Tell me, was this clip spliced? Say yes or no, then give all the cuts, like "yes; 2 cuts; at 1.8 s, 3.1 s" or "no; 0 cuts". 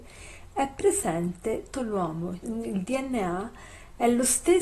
yes; 2 cuts; at 1.7 s, 2.4 s